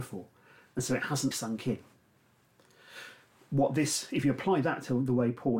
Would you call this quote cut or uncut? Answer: cut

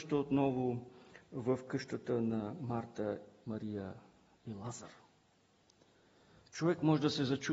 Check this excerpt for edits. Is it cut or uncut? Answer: uncut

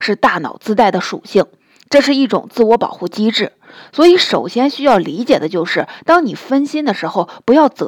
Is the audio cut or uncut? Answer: uncut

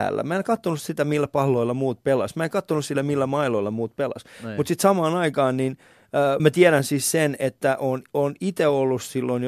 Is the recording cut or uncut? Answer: cut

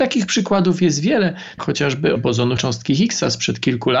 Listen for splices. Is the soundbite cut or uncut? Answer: cut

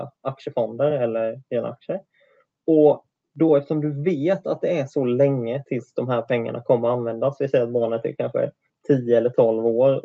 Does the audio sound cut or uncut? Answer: uncut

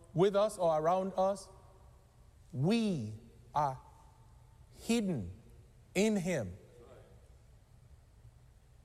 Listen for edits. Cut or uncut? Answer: uncut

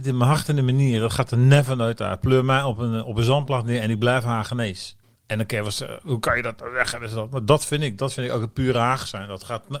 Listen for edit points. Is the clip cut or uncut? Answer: cut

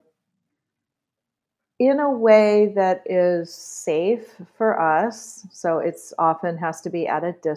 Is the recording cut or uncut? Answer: uncut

